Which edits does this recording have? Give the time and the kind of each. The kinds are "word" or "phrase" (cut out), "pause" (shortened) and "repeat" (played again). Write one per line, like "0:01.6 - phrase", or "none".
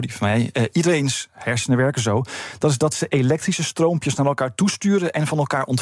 none

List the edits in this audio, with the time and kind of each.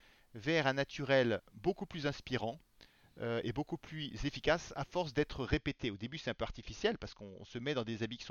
none

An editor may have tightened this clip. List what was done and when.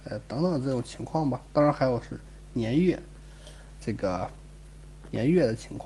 0:03.8 - word

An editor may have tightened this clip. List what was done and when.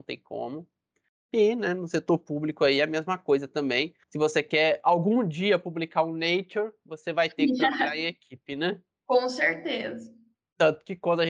0:04.0 - pause

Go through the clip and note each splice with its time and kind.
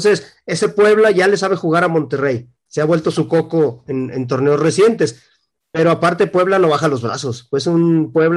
none

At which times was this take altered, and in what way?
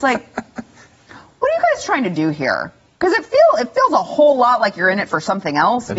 none

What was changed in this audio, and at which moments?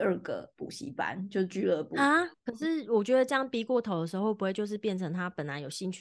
0:02.4 - pause

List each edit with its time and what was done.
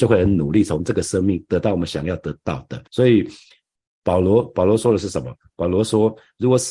0:02.9 - pause

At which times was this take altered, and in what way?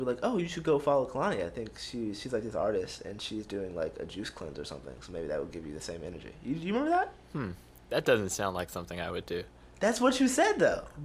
0:07.2 - pause

